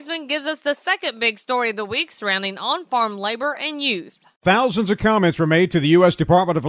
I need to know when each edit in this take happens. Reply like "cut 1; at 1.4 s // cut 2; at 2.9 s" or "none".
none